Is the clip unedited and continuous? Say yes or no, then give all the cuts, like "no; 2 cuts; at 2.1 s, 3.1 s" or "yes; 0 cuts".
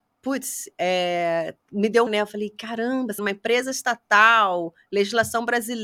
no; 3 cuts; at 1.6 s, 2.1 s, 3.2 s